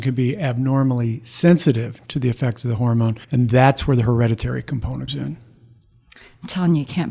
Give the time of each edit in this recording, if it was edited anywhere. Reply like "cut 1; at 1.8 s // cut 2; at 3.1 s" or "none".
cut 1; at 3.2 s // cut 2; at 5.1 s